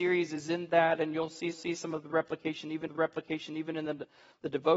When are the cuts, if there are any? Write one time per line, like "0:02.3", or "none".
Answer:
0:01.5
0:02.9

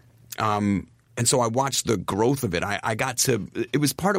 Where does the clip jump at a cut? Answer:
none

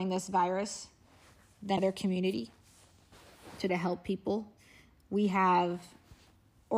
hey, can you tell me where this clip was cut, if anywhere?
0:01.8
0:03.7

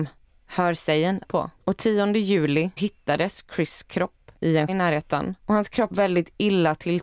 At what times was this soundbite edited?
0:01.2
0:01.6
0:02.8
0:04.4
0:04.7
0:05.4
0:05.9

